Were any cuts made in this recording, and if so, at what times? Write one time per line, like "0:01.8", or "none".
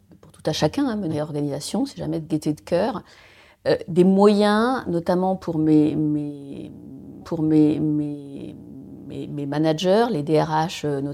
0:01.1
0:07.2